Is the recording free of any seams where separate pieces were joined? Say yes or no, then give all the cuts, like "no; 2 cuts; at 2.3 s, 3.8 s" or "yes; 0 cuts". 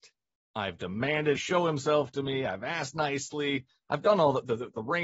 no; 1 cut; at 1.4 s